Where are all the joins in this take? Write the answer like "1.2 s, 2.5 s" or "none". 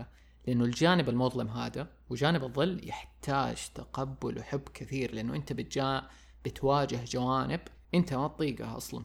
7.8 s